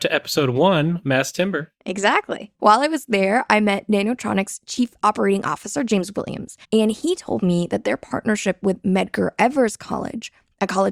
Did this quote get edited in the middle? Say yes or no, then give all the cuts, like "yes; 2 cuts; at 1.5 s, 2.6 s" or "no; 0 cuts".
yes; 1 cut; at 6.6 s